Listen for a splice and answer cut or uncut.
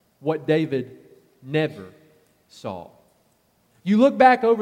uncut